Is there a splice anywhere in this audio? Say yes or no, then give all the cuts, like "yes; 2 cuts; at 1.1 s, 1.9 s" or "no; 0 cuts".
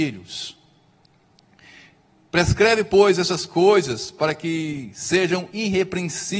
no; 0 cuts